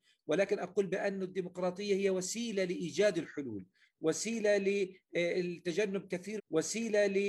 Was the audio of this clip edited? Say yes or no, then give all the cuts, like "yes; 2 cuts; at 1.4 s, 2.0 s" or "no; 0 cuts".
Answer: yes; 1 cut; at 6.4 s